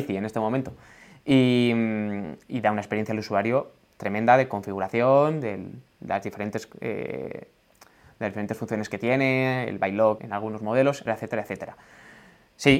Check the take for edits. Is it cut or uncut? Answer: cut